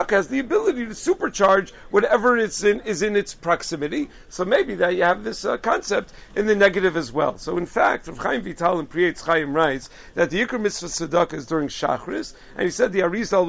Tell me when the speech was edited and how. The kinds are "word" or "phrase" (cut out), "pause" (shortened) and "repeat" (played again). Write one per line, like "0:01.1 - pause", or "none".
none